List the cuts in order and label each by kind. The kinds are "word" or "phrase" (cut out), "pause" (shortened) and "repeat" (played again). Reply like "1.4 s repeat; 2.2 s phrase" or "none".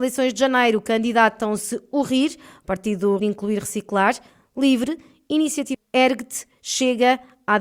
3.2 s word; 5.7 s word